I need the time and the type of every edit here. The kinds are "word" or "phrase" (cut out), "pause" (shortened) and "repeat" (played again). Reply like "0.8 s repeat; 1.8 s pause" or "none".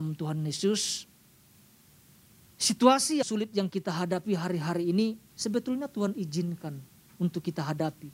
3.2 s word; 5.3 s pause